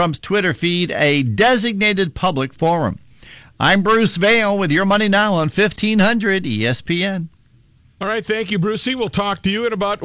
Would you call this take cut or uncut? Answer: uncut